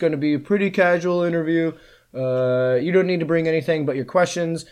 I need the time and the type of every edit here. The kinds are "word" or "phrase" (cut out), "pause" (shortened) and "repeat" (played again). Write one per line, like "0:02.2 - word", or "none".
none